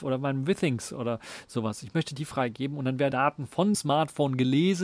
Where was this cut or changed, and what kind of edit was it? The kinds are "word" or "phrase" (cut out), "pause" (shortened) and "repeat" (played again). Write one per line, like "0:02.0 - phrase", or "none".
0:03.1 - word
0:03.7 - word